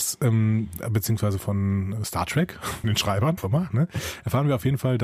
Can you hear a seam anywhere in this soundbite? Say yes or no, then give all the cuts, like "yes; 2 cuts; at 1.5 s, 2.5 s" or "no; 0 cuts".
yes; 3 cuts; at 1.4 s, 2.8 s, 3.4 s